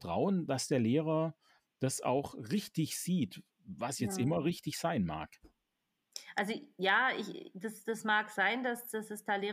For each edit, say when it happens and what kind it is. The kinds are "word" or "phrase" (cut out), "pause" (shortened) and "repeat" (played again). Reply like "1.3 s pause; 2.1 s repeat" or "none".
none